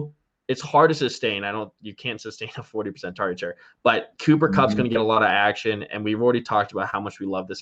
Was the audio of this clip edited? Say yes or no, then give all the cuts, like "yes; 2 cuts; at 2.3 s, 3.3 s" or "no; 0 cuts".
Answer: no; 0 cuts